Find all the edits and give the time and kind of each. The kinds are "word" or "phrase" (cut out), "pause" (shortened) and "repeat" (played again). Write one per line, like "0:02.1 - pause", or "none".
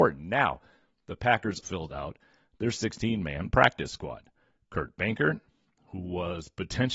0:01.6 - word